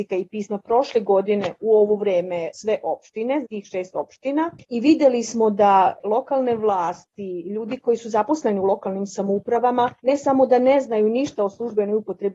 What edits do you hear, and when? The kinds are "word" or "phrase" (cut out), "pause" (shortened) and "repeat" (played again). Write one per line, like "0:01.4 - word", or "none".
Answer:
0:03.4 - word
0:04.6 - pause
0:10.0 - pause